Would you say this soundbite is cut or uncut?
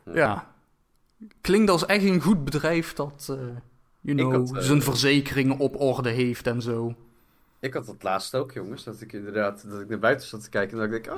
uncut